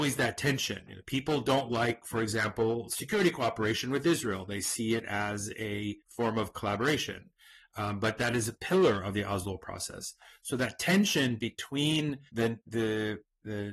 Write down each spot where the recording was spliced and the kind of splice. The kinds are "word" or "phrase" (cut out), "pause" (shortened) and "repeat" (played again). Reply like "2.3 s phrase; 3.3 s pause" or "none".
6.0 s pause; 12.3 s pause

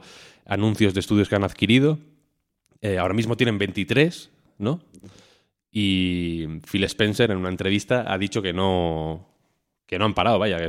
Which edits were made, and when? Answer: none

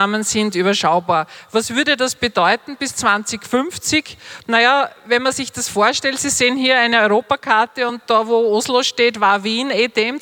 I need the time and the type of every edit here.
none

